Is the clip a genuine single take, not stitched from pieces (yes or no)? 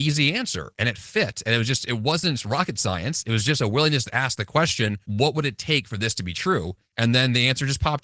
no